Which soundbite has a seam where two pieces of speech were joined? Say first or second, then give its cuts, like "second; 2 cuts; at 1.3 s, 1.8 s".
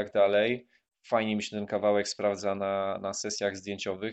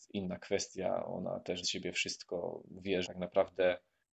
second; 2 cuts; at 1.6 s, 3.0 s